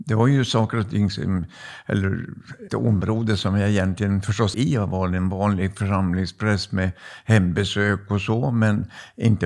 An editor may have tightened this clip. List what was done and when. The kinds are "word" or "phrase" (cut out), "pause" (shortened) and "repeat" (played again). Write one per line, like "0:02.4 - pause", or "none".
0:02.7 - word
0:04.5 - phrase